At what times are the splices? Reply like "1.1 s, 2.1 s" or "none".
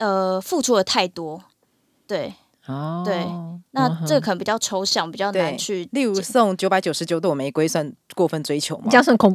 none